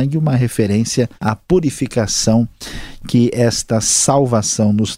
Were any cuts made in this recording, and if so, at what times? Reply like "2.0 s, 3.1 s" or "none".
1.2 s